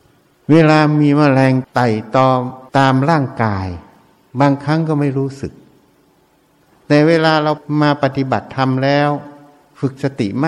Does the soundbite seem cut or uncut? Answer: uncut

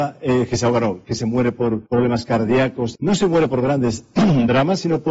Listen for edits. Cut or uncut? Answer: cut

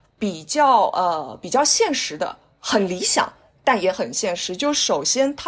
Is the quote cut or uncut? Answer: uncut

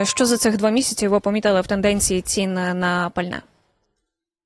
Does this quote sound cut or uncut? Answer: uncut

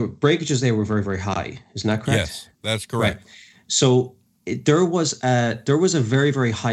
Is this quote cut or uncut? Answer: uncut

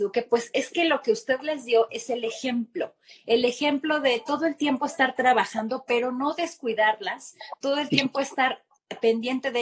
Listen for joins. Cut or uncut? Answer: uncut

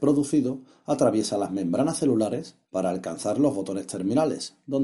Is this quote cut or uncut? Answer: cut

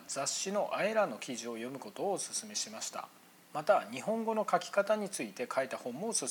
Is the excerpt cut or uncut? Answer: uncut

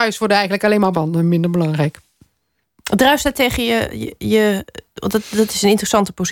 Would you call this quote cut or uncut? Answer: cut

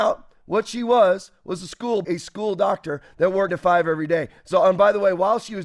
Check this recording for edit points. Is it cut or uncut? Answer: cut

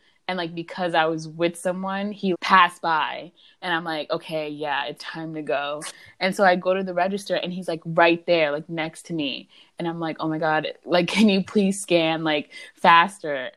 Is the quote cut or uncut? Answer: cut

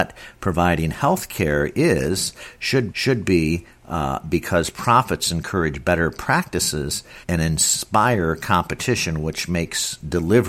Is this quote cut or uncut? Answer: cut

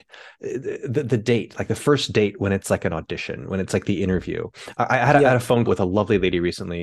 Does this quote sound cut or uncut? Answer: cut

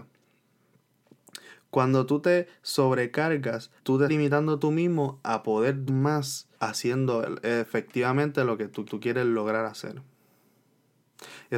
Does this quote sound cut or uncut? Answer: cut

